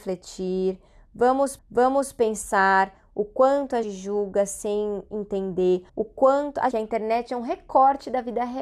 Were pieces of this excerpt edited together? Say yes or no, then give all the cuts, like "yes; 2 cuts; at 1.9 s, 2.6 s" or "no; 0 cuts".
yes; 4 cuts; at 1.6 s, 3.8 s, 5.9 s, 6.7 s